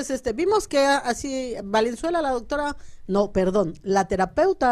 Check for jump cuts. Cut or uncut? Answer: uncut